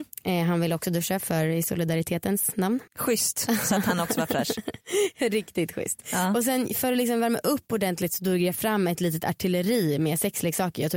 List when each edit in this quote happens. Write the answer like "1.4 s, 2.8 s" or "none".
2.9 s